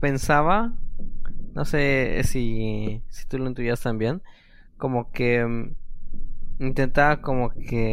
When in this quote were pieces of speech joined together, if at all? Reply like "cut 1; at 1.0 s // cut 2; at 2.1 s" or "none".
none